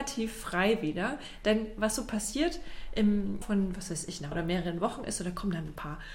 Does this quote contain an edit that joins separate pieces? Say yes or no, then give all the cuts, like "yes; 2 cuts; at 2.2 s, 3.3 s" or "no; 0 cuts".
yes; 2 cuts; at 3.4 s, 4.3 s